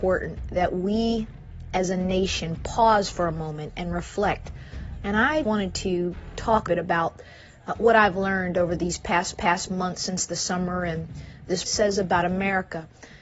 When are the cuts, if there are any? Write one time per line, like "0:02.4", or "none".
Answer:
0:05.4
0:06.7
0:09.3
0:11.6